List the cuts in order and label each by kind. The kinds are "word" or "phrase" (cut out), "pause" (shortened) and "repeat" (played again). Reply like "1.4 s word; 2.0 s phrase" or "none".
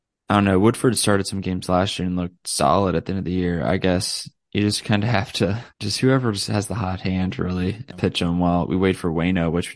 5.7 s pause; 7.9 s word